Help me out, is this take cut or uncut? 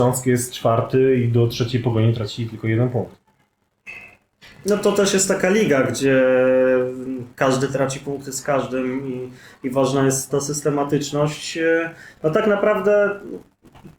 cut